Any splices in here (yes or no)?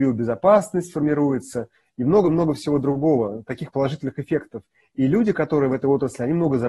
no